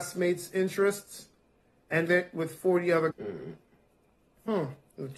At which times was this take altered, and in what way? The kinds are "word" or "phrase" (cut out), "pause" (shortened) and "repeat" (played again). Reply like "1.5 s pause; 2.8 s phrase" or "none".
2.1 s word; 3.1 s word